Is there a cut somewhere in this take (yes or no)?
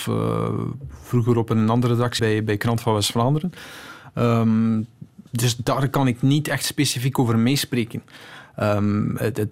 yes